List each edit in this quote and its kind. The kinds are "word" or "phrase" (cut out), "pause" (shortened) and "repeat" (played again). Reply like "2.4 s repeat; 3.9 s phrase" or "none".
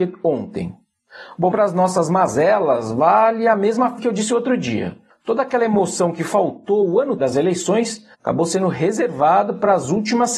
1.5 s phrase; 4.0 s word; 5.1 s pause; 7.2 s word; 8.1 s pause